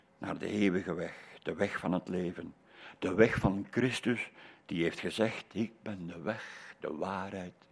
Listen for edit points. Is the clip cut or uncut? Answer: uncut